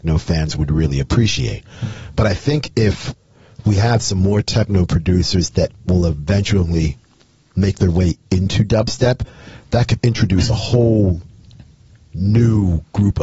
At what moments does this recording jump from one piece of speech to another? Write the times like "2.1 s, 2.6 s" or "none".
10.0 s